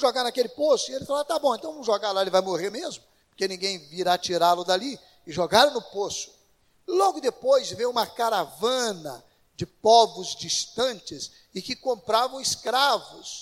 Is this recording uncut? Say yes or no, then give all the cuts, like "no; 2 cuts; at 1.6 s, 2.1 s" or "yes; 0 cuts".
yes; 0 cuts